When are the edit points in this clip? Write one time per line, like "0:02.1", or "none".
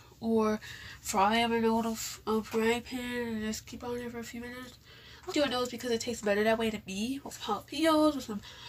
0:05.3
0:07.3